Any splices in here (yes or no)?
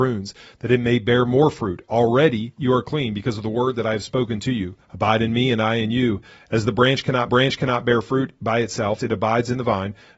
yes